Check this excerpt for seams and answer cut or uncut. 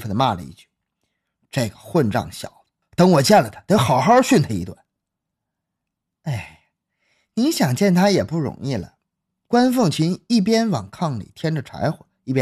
uncut